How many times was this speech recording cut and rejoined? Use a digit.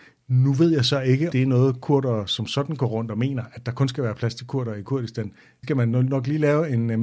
2